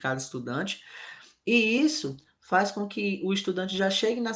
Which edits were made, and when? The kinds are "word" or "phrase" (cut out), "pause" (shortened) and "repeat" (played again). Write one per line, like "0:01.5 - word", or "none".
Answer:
none